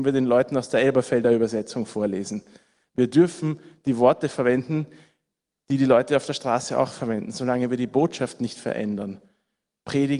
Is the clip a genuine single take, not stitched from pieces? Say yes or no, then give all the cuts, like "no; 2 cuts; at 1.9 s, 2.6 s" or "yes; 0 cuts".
yes; 0 cuts